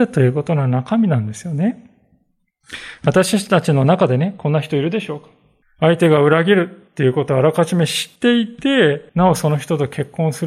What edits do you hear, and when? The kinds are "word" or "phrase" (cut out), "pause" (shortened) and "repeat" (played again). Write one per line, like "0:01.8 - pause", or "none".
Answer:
0:05.6 - pause
0:06.9 - pause
0:08.2 - pause
0:09.1 - pause